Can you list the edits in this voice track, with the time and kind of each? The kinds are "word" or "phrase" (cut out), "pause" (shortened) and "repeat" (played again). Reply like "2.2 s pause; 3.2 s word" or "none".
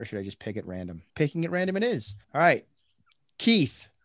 1.1 s pause; 2.2 s pause